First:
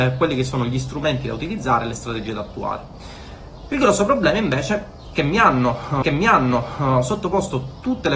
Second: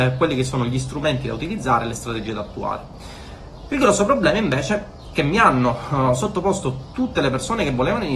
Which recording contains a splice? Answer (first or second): first